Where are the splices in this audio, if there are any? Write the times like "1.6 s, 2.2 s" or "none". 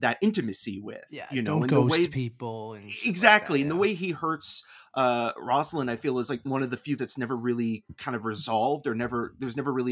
7.0 s